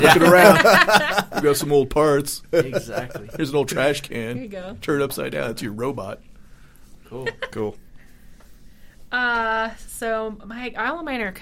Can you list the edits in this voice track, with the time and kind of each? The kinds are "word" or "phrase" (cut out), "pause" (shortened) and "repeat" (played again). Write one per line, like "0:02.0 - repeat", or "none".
none